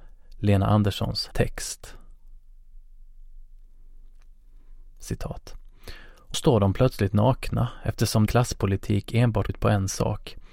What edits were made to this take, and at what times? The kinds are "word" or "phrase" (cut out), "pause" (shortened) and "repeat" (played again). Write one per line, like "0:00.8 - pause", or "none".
0:01.3 - phrase
0:06.3 - word
0:08.3 - word
0:09.5 - word